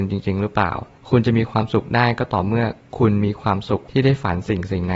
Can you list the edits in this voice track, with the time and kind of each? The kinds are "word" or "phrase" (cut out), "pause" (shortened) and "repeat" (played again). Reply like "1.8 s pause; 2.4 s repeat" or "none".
none